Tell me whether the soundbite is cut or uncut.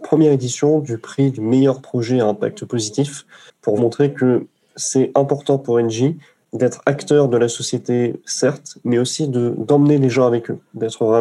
cut